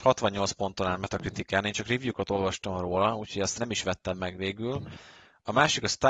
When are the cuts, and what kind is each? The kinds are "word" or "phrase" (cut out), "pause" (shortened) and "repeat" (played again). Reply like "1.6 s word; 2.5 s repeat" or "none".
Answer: 3.6 s word